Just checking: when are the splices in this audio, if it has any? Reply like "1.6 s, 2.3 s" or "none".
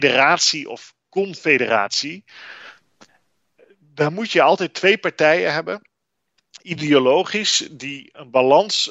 none